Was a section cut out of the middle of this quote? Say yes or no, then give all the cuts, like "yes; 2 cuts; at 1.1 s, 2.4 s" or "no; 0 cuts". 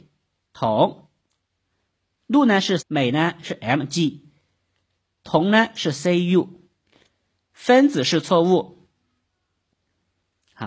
yes; 1 cut; at 2.8 s